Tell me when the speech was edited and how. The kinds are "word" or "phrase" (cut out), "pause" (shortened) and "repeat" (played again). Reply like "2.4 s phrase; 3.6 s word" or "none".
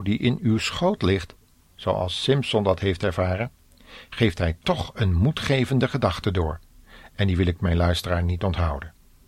none